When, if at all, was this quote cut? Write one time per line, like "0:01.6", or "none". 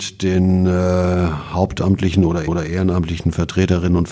0:02.5